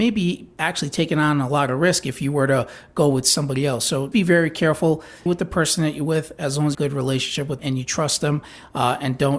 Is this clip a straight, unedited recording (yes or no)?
no